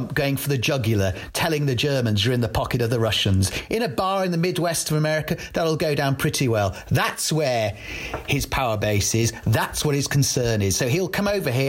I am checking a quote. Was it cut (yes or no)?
no